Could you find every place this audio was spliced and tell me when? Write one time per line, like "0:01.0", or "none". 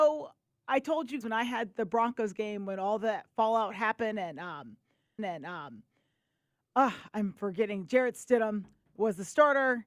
0:01.2
0:05.2